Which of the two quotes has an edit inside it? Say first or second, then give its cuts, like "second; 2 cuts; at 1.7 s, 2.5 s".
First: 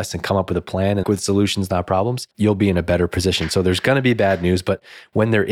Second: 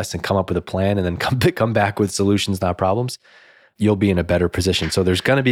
first; 2 cuts; at 1.0 s, 2.3 s